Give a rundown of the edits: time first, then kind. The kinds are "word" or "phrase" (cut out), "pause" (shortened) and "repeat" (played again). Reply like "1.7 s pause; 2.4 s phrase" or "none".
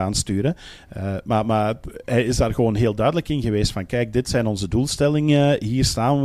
none